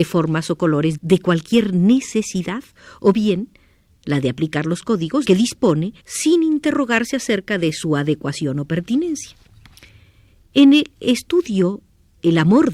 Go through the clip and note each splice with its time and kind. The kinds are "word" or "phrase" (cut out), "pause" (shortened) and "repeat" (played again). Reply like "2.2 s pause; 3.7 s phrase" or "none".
1.0 s word; 5.2 s word; 6.0 s pause